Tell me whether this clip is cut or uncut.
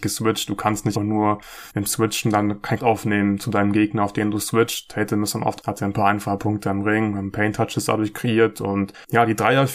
cut